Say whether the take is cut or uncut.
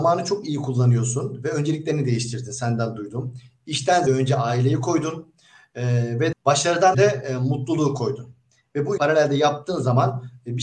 cut